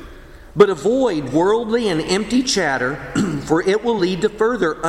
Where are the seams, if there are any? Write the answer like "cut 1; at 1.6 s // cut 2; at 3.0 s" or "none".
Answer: none